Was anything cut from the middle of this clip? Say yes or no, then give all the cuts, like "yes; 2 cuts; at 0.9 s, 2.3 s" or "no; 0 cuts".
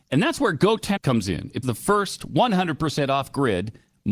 yes; 2 cuts; at 1.0 s, 1.6 s